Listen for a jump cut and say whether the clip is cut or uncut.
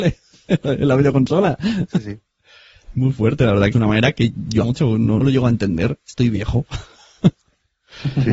cut